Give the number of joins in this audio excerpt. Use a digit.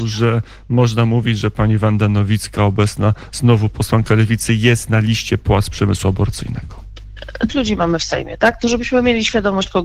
1